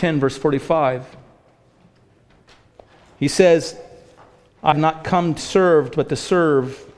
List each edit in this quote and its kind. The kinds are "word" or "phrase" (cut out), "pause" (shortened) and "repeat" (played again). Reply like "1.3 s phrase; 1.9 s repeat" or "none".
4.7 s word; 5.4 s word